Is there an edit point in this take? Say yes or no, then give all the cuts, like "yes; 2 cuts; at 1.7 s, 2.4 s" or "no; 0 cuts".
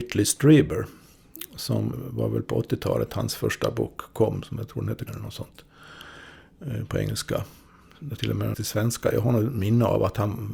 yes; 4 cuts; at 1.9 s, 5.1 s, 8.2 s, 8.5 s